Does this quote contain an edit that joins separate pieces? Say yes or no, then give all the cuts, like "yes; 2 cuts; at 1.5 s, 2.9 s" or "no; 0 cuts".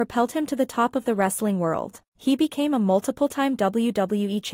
yes; 1 cut; at 2.1 s